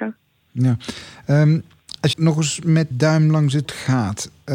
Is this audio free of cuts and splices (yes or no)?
no